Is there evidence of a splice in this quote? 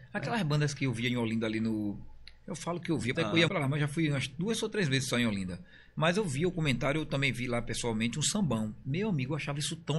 yes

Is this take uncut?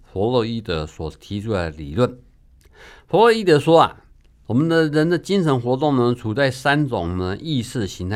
yes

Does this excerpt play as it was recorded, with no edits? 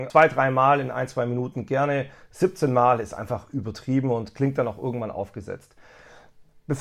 yes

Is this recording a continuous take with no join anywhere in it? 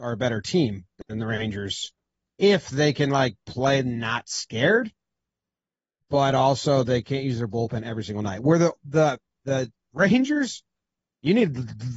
yes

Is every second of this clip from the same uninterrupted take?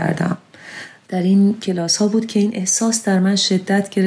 yes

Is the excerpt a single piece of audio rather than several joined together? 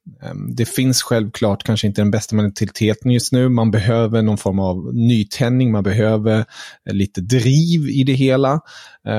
yes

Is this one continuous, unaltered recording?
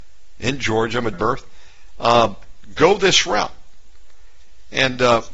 no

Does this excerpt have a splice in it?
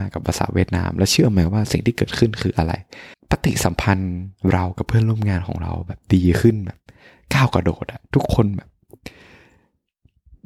yes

